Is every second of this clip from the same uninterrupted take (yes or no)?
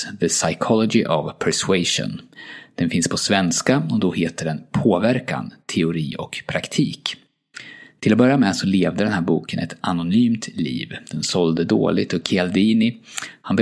yes